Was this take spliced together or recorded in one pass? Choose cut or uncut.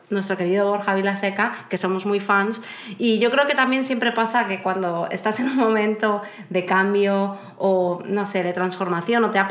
uncut